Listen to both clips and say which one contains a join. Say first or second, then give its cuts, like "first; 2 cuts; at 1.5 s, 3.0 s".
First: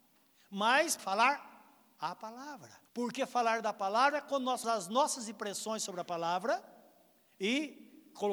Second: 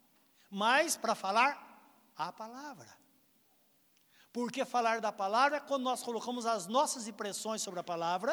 first; 3 cuts; at 1.0 s, 2.9 s, 4.6 s